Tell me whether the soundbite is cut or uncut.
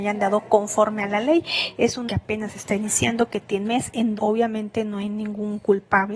cut